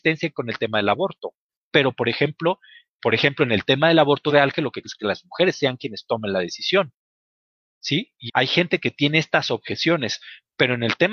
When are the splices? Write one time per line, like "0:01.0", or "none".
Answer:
0:03.0
0:04.3
0:04.8
0:08.3